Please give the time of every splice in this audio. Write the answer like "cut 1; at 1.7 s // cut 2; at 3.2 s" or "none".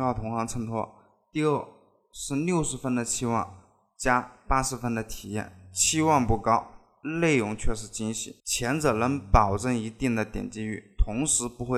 cut 1; at 8.4 s